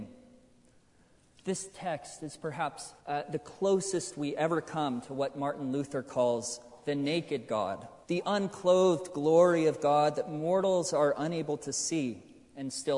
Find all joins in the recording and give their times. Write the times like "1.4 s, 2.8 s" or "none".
3.0 s, 8.0 s